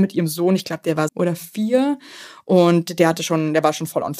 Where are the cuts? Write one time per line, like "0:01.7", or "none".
0:01.1